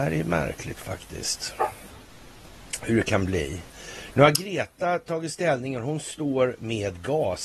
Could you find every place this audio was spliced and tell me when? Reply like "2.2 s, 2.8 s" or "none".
none